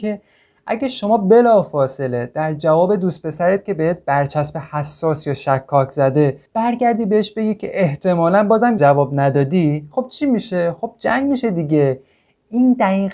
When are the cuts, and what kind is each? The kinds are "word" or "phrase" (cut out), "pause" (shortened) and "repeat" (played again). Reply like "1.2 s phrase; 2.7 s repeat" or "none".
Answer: 6.5 s pause; 8.8 s phrase